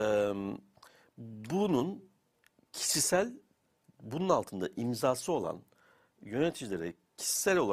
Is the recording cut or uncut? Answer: uncut